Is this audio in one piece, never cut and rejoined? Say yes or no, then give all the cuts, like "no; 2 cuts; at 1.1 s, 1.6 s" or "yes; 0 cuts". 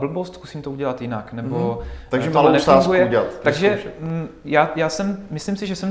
yes; 0 cuts